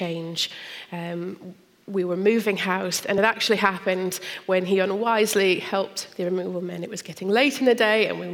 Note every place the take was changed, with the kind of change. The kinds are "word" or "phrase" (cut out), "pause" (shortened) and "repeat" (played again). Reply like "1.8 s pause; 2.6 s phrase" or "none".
none